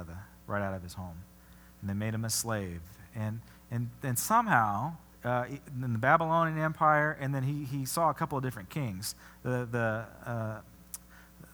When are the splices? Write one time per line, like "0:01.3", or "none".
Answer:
0:05.1